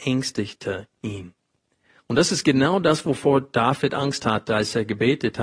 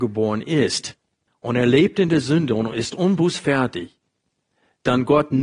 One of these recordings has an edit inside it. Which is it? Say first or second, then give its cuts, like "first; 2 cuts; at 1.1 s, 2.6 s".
second; 1 cut; at 1.3 s